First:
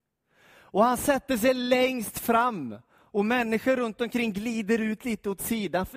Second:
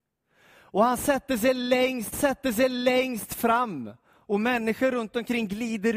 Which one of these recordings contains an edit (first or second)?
second